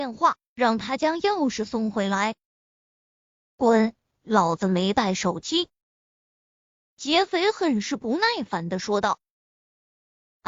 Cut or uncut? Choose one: uncut